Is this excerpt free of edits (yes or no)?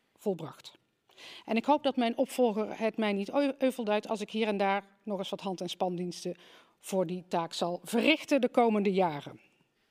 yes